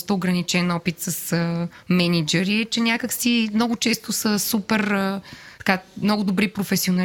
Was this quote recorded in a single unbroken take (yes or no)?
no